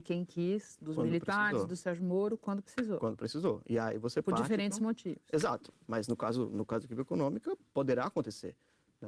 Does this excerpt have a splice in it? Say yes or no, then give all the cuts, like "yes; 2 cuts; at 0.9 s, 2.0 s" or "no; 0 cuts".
no; 0 cuts